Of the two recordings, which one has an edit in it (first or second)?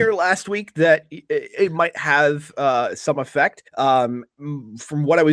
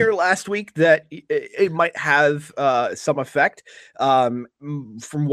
first